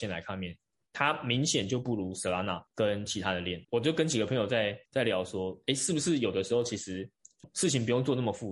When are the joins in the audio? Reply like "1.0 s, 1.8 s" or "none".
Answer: 2.7 s, 3.6 s, 4.9 s